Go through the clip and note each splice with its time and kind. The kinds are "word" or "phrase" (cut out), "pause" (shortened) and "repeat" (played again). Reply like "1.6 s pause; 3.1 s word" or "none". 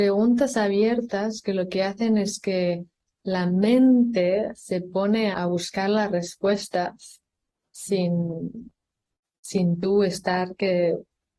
5.3 s word